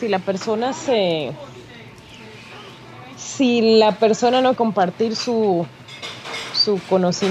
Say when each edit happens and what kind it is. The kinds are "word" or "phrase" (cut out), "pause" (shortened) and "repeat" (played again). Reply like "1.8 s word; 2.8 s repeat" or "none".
4.6 s word